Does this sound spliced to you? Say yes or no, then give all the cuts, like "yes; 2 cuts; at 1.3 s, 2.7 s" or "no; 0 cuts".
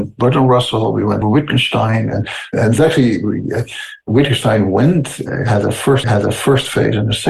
yes; 2 cuts; at 1.2 s, 6.0 s